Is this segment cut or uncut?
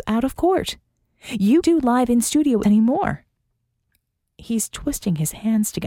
cut